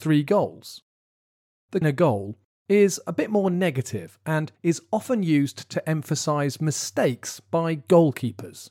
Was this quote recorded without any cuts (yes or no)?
no